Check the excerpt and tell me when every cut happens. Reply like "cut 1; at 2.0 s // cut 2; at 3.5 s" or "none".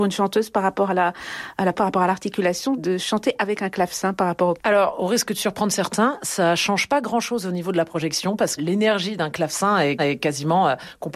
cut 1; at 1.7 s // cut 2; at 2.8 s // cut 3; at 4.6 s // cut 4; at 8.6 s // cut 5; at 10.0 s